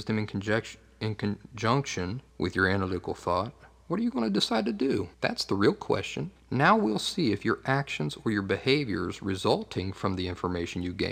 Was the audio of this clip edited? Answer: yes; 3 cuts; at 2.3 s, 5.1 s, 6.4 s

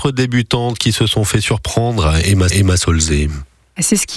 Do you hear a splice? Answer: yes; 1 cut; at 2.5 s

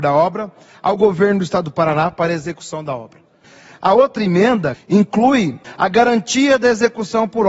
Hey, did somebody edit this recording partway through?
no; 0 cuts

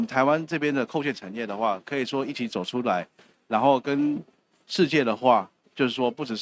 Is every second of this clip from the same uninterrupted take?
yes; 0 cuts

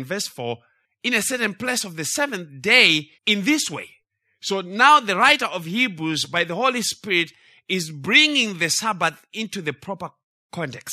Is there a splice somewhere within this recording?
yes; 2 cuts; at 3.1 s, 4.0 s

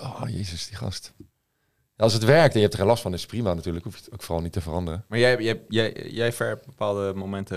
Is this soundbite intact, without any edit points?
yes; 0 cuts

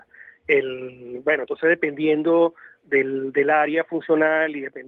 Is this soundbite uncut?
yes; 0 cuts

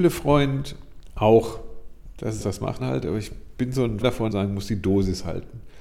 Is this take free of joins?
no; 4 cuts; at 2.4 s, 2.8 s, 4.0 s, 4.3 s

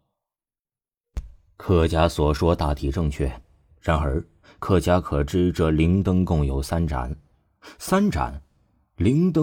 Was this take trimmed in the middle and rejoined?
no; 0 cuts

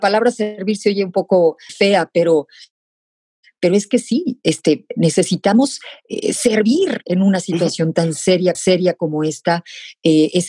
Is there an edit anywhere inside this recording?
yes; 2 cuts; at 1.7 s, 8.5 s

